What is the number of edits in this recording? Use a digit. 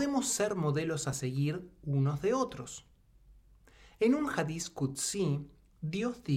0